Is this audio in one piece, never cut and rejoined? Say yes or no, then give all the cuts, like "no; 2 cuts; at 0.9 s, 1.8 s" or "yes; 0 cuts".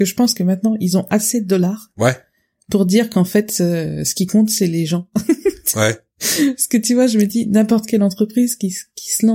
yes; 0 cuts